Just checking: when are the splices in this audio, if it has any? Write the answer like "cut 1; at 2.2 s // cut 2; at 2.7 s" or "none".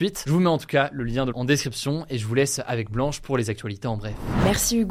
cut 1; at 1.3 s